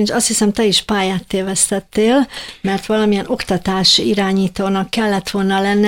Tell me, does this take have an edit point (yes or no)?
no